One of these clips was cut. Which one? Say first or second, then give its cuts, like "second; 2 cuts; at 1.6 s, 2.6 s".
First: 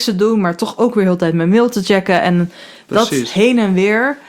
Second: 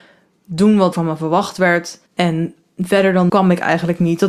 second; 3 cuts; at 0.9 s, 2.1 s, 3.3 s